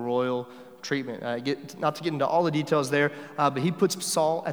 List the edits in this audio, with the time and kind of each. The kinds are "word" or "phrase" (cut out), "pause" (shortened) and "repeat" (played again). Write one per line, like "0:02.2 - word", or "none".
none